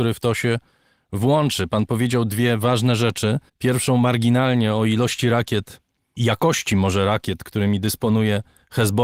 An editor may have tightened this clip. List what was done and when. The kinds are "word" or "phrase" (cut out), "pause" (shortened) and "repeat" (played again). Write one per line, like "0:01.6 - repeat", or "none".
0:03.5 - pause
0:06.2 - word